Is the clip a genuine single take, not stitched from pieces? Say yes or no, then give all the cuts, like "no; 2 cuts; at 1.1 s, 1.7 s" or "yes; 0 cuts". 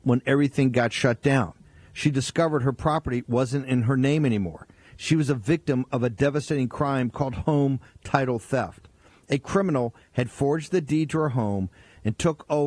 yes; 0 cuts